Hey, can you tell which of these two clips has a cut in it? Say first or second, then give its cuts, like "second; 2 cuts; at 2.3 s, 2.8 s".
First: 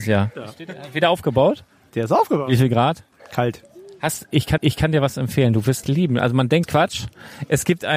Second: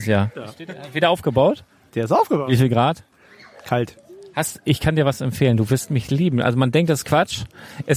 first; 4 cuts; at 3.2 s, 4.6 s, 5.8 s, 6.6 s